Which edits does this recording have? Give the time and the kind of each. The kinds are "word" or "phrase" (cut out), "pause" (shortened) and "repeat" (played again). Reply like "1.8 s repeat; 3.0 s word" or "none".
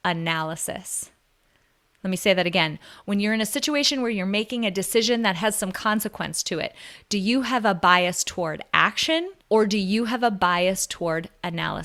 9.4 s pause